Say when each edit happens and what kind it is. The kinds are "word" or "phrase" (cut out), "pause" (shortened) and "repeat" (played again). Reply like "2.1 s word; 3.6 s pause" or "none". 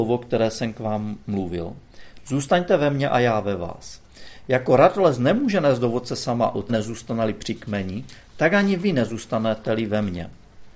6.7 s word

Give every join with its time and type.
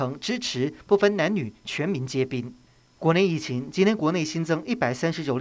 2.7 s pause

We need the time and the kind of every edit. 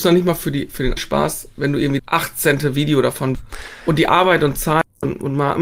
1.0 s word; 2.0 s word; 3.3 s word

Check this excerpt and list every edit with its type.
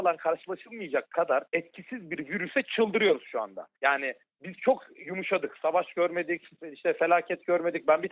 1.5 s pause; 3.7 s pause

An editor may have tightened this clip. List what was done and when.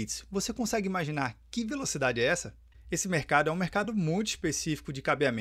none

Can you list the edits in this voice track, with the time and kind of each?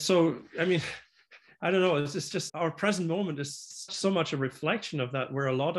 2.5 s word; 3.9 s word

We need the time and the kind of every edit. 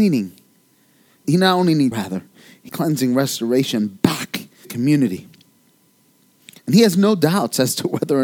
1.2 s word; 1.9 s word; 2.7 s word; 4.6 s word

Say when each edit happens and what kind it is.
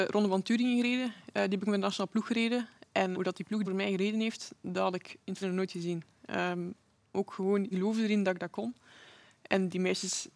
3.1 s word; 3.6 s word; 5.4 s word; 7.7 s word

